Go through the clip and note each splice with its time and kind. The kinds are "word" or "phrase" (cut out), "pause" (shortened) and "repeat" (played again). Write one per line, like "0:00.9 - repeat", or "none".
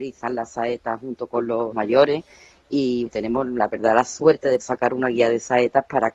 0:01.7 - word
0:03.1 - word
0:04.6 - word